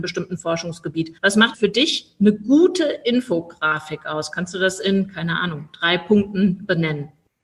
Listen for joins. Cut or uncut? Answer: cut